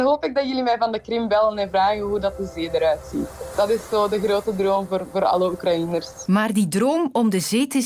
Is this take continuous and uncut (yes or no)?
yes